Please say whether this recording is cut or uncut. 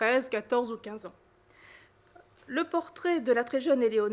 uncut